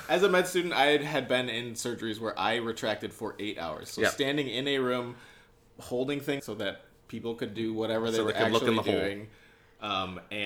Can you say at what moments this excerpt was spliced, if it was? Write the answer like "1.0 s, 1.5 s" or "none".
6.4 s